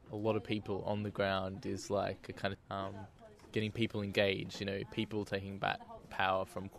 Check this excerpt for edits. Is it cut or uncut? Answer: cut